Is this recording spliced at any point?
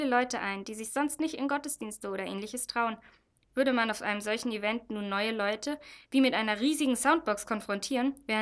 no; 0 cuts

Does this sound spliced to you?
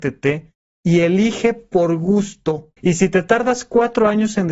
yes; 1 cut; at 2.8 s

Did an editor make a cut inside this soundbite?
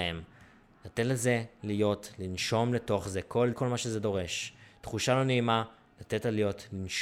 yes; 1 cut; at 3.5 s

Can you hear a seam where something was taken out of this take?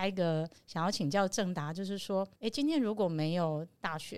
yes; 1 cut; at 2.3 s

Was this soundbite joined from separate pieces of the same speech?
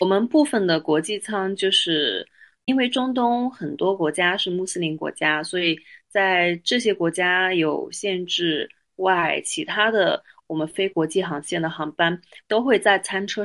no; 0 cuts

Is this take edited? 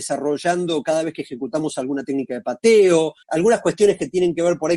yes; 1 cut; at 3.2 s

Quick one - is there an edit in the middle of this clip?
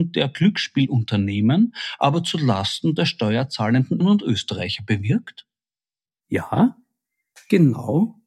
yes; 1 cut; at 4.0 s

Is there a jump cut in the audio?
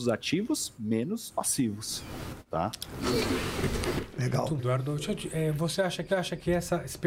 yes; 3 cuts; at 1.3 s, 4.6 s, 6.1 s

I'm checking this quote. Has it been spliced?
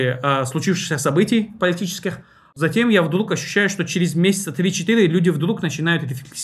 no; 0 cuts

